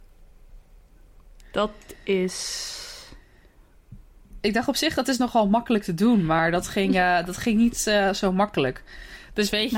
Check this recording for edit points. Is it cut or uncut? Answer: uncut